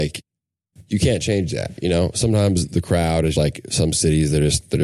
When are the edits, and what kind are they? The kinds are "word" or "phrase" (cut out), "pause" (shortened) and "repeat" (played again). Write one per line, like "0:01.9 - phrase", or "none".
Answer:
0:03.4 - word